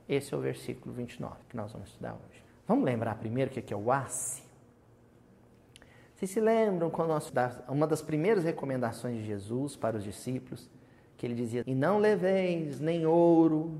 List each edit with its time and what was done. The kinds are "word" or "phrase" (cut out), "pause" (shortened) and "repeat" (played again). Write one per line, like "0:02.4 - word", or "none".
0:01.4 - pause
0:02.5 - pause
0:07.3 - word
0:11.6 - word

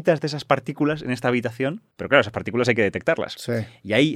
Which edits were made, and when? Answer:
0:01.9 - pause

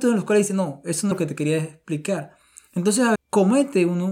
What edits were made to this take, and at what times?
0:01.1 - word
0:03.2 - word

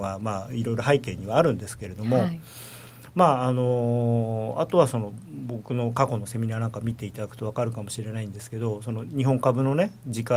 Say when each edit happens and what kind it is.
none

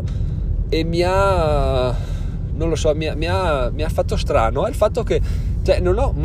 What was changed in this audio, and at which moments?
none

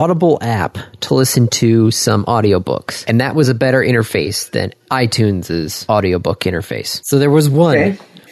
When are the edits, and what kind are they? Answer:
none

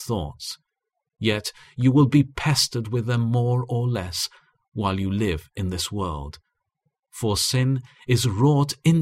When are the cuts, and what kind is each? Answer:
none

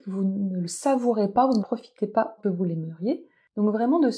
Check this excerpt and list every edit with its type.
0:01.6 - word
0:02.4 - word

